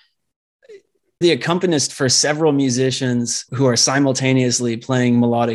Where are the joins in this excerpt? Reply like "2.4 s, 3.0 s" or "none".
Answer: 1.2 s, 3.5 s